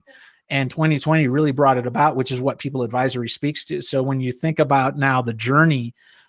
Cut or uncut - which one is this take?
uncut